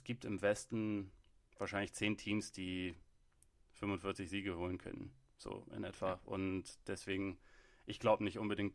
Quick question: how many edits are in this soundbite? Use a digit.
0